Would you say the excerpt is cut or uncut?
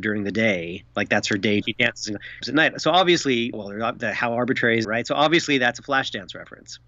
cut